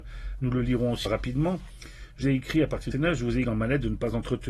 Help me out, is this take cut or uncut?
cut